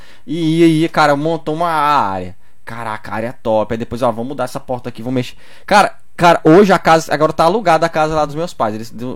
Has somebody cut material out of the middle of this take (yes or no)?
no